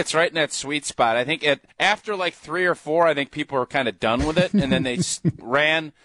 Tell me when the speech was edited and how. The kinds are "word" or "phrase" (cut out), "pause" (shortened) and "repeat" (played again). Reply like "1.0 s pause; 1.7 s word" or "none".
1.7 s pause